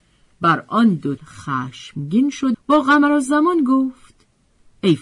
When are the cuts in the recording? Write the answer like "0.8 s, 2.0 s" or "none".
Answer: 1.2 s, 2.5 s